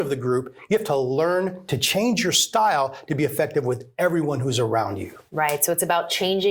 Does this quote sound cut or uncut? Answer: uncut